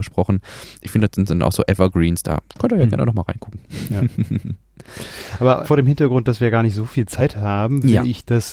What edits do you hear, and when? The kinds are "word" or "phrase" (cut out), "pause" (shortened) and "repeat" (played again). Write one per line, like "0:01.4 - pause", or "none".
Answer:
0:02.5 - pause
0:05.6 - word